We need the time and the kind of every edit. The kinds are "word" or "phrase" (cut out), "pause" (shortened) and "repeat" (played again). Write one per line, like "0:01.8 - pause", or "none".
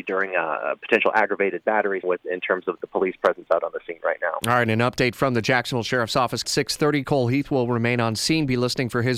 0:02.0 - word
0:06.4 - phrase